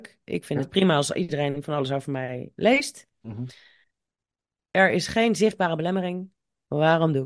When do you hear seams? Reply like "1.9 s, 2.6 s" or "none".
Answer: none